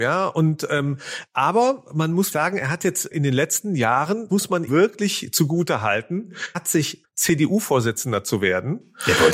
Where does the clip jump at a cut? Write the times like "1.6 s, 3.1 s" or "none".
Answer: 2.3 s, 3.1 s, 4.3 s, 4.7 s, 6.5 s, 7.0 s